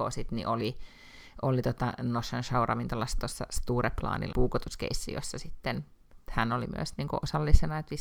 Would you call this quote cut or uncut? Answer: cut